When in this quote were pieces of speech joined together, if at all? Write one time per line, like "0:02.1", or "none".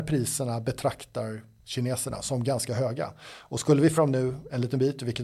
0:04.0